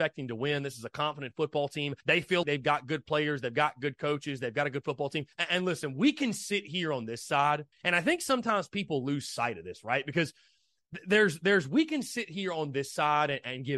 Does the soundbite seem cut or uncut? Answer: cut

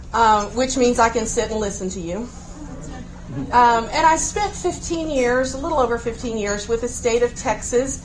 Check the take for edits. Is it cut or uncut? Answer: uncut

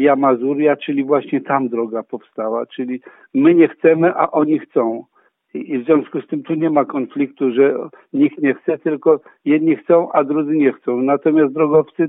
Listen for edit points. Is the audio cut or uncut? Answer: uncut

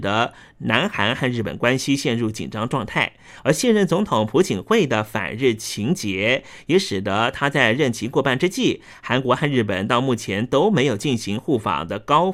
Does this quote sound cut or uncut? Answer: uncut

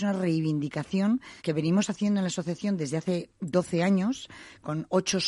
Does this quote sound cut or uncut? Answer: cut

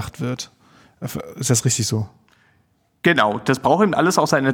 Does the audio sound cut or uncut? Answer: uncut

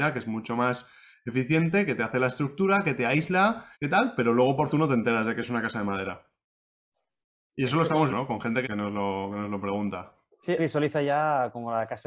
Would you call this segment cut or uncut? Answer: cut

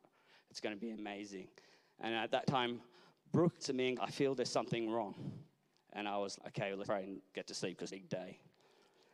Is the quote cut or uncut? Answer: cut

